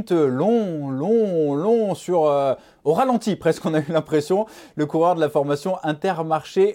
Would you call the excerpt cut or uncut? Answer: uncut